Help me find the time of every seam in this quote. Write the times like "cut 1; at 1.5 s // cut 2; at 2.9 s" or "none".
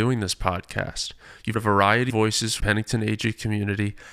cut 1; at 1.5 s // cut 2; at 2.1 s // cut 3; at 2.6 s